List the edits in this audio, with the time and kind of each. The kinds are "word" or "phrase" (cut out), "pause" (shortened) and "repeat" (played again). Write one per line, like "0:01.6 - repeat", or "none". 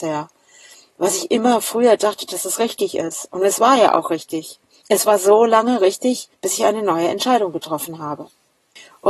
0:04.7 - pause
0:06.3 - pause